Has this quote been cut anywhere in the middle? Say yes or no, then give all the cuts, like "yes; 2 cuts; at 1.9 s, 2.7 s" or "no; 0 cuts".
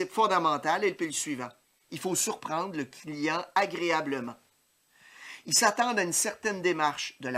yes; 2 cuts; at 1.0 s, 1.6 s